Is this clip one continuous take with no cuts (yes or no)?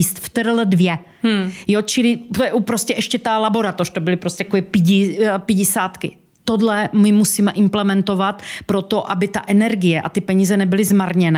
yes